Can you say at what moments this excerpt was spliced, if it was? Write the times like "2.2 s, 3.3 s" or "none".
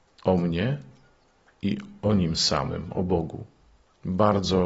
none